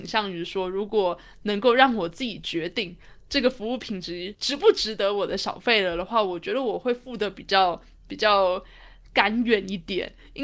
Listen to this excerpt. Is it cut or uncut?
uncut